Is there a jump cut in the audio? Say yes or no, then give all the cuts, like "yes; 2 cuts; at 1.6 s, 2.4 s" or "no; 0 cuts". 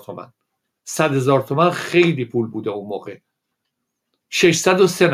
no; 0 cuts